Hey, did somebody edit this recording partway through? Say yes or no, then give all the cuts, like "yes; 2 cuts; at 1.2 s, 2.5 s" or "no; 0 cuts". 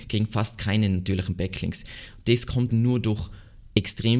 yes; 1 cut; at 2.7 s